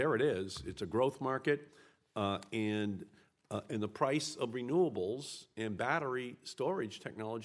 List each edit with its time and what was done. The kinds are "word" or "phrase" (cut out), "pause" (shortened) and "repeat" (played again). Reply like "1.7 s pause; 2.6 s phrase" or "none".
none